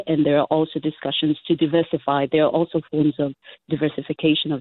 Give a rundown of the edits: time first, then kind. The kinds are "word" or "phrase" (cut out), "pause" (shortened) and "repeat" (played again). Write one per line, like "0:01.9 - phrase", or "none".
none